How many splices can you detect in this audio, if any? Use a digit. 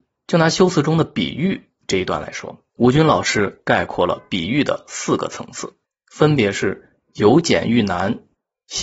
2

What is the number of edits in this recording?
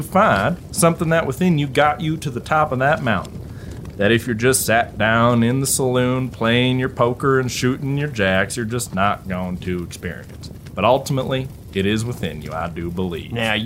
0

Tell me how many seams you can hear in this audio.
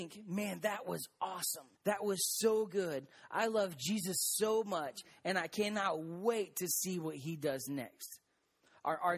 1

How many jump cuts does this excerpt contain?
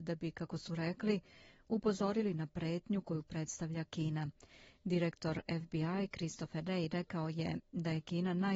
0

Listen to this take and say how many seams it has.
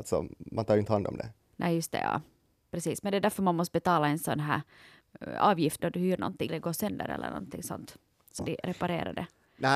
3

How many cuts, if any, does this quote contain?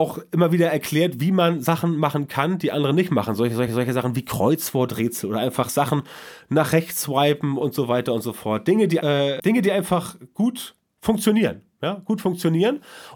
3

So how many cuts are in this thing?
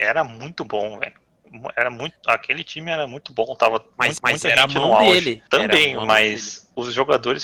2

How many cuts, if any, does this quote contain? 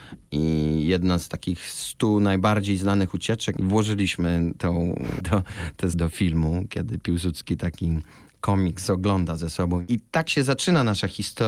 2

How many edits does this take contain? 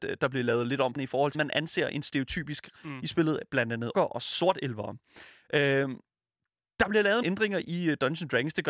5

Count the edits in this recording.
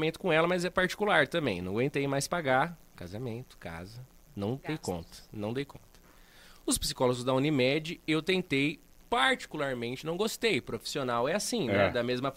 0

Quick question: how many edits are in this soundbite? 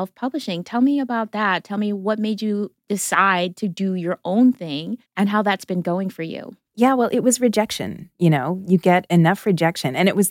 1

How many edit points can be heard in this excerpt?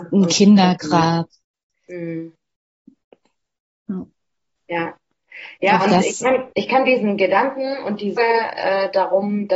2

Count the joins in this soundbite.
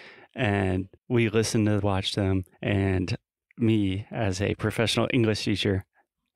3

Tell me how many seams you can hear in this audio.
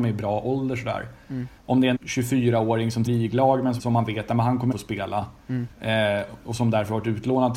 6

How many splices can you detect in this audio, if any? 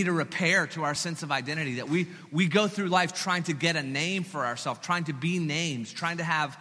0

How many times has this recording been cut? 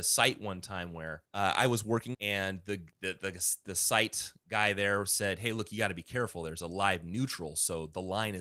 3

